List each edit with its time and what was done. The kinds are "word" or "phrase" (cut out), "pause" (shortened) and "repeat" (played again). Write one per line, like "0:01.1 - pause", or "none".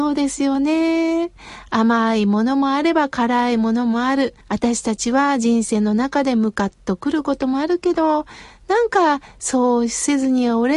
0:04.4 - pause